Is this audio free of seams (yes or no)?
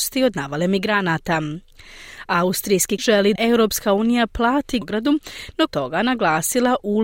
no